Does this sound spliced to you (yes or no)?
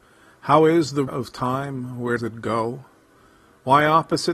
yes